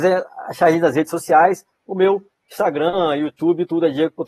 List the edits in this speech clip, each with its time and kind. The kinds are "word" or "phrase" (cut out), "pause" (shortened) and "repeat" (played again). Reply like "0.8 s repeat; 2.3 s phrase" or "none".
none